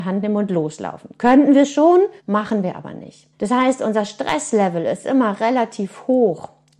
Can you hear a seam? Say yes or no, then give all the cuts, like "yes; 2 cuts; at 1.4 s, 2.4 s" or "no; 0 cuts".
yes; 2 cuts; at 2.2 s, 3.3 s